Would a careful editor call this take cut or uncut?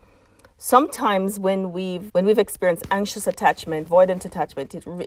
cut